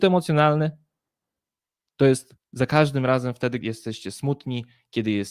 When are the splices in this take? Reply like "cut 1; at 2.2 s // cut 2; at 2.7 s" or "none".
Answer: cut 1; at 3.6 s